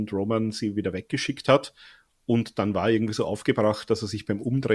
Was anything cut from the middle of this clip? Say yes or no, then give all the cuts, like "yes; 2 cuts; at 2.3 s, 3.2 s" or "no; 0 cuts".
no; 0 cuts